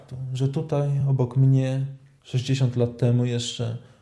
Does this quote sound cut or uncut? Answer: uncut